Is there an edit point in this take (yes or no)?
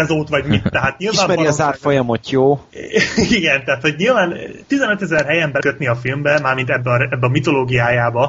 yes